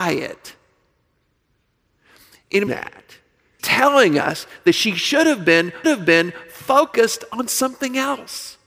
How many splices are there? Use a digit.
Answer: 3